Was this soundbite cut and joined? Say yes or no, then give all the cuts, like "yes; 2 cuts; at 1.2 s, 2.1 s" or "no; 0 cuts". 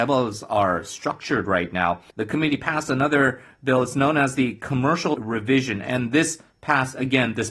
yes; 2 cuts; at 2.1 s, 5.1 s